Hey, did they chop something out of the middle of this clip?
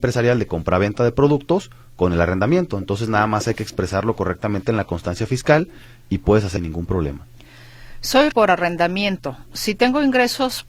yes; 2 cuts; at 6.6 s, 8.3 s

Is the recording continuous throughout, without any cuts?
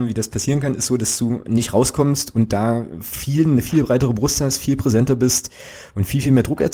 yes; 0 cuts

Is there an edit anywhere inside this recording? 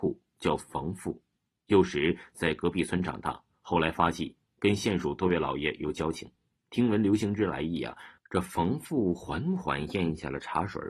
no; 0 cuts

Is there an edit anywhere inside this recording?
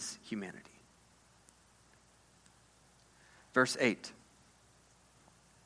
no; 0 cuts

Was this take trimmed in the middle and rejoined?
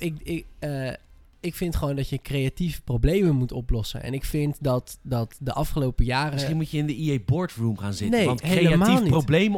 no; 0 cuts

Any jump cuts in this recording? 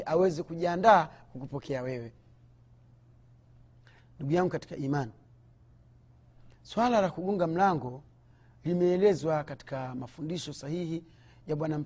no; 0 cuts

